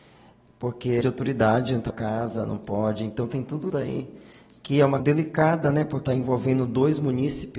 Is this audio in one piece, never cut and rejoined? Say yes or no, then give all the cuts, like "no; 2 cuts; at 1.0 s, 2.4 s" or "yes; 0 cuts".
no; 5 cuts; at 1.0 s, 1.9 s, 3.7 s, 5.0 s, 6.1 s